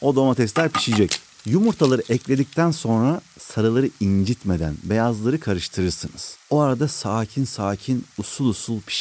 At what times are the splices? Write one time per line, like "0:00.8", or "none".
0:06.4